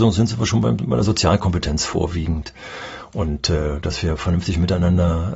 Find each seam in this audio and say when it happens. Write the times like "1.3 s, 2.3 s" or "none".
none